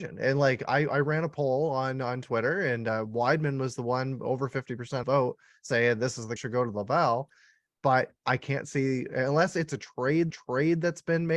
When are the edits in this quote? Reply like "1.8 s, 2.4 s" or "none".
5.0 s, 6.4 s, 10.3 s